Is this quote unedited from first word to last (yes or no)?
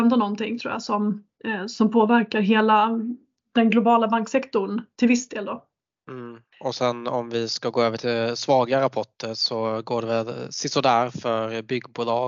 yes